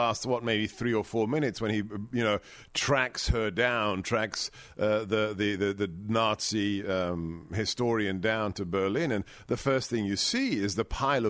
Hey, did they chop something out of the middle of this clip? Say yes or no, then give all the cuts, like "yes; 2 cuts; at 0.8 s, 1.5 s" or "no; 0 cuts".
no; 0 cuts